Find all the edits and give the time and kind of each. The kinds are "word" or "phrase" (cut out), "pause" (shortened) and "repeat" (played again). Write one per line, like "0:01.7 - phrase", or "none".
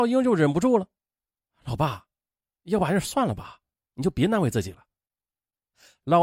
none